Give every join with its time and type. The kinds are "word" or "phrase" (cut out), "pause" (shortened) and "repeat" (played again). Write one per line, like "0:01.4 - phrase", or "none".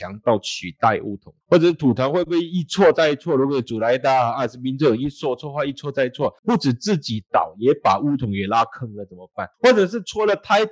0:01.4 - pause
0:06.4 - pause
0:09.5 - pause